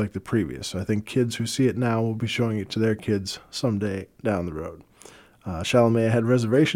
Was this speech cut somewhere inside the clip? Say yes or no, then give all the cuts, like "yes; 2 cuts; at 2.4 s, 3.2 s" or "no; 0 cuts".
no; 0 cuts